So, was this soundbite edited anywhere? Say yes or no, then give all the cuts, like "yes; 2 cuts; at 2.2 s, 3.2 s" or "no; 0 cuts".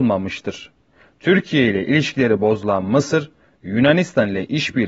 no; 0 cuts